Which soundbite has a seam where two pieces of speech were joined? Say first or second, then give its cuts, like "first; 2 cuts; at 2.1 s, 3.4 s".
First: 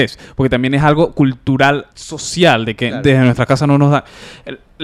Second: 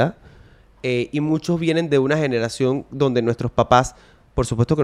first; 1 cut; at 1.9 s